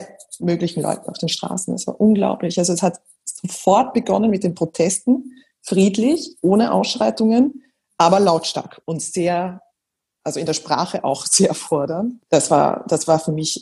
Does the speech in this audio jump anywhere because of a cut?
no; 0 cuts

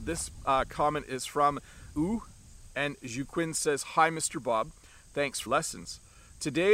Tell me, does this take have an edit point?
yes; 2 cuts; at 1.9 s, 5.5 s

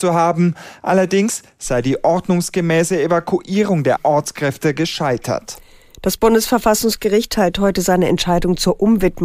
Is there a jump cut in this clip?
yes; 1 cut; at 4.0 s

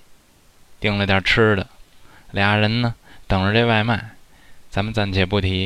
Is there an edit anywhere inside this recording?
no; 0 cuts

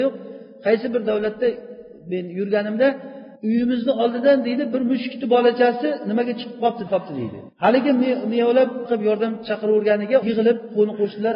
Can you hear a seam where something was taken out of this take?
yes; 5 cuts; at 3.3 s, 6.9 s, 7.5 s, 8.9 s, 10.2 s

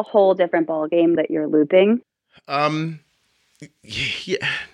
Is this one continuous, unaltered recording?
no; 1 cut; at 1.1 s

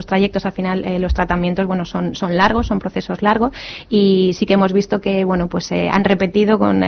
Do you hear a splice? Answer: no; 0 cuts

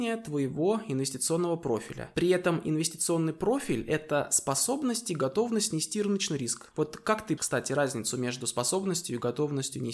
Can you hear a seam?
yes; 1 cut; at 7.4 s

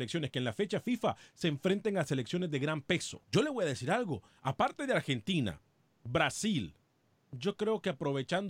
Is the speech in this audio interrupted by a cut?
yes; 2 cuts; at 3.2 s, 7.0 s

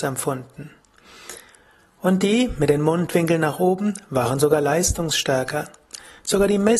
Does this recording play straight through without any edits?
yes; 0 cuts

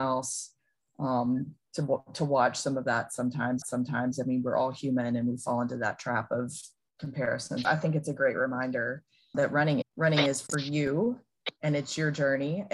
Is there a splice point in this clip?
yes; 6 cuts; at 1.7 s, 3.6 s, 7.6 s, 9.3 s, 9.8 s, 11.6 s

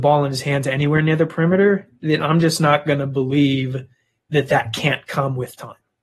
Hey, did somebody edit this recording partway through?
no; 0 cuts

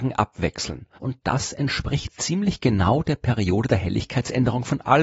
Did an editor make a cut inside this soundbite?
yes; 1 cut; at 0.9 s

